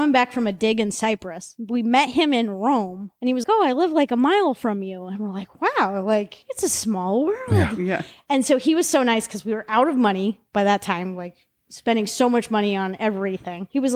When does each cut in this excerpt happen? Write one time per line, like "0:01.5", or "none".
0:03.4